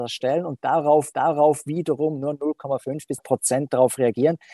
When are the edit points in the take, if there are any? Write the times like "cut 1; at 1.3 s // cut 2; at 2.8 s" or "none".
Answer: cut 1; at 1.1 s // cut 2; at 3.2 s